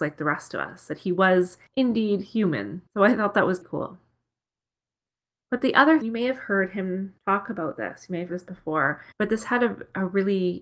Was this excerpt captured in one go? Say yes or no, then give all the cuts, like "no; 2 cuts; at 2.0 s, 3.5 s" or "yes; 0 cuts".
no; 7 cuts; at 1.7 s, 2.9 s, 3.6 s, 6.0 s, 7.2 s, 8.3 s, 9.1 s